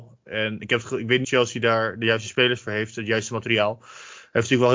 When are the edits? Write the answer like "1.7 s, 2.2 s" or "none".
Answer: 1.2 s